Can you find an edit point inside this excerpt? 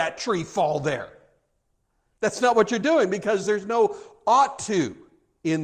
no; 0 cuts

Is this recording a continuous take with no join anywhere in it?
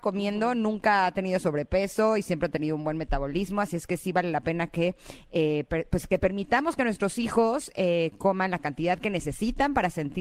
yes; 0 cuts

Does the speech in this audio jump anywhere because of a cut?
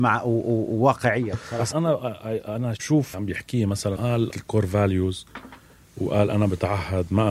yes; 5 cuts; at 1.7 s, 2.8 s, 3.1 s, 4.0 s, 4.3 s

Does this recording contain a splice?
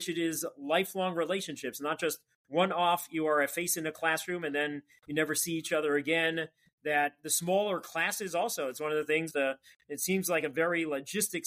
yes; 1 cut; at 9.3 s

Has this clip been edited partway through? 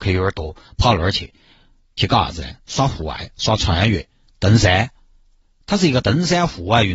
no; 0 cuts

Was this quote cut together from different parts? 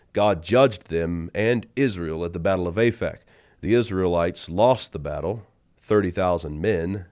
no; 0 cuts

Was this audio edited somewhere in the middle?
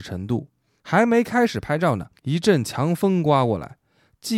yes; 1 cut; at 2.2 s

